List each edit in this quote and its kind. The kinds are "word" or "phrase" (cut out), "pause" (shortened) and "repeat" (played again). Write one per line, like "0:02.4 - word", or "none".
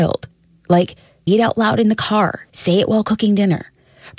0:01.3 - word
0:02.5 - pause